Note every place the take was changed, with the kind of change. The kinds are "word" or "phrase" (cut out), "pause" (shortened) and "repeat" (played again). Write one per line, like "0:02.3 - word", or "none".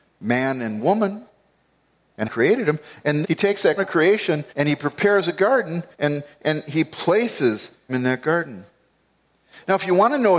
0:02.2 - phrase
0:03.2 - word
0:03.8 - word
0:04.5 - pause
0:05.9 - pause
0:07.9 - word